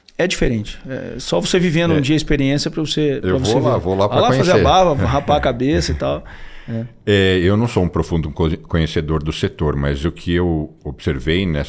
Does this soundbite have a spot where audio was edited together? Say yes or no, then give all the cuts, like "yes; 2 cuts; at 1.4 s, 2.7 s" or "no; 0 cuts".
no; 0 cuts